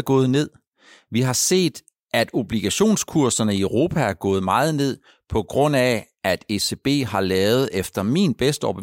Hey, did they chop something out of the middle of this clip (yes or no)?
no